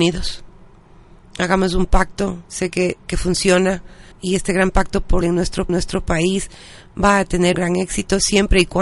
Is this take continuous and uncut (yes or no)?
no